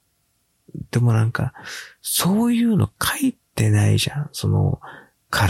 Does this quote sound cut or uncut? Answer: cut